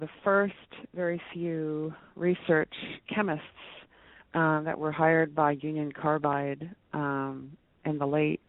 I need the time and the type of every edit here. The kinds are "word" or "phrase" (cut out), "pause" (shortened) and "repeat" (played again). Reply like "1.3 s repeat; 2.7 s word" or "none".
none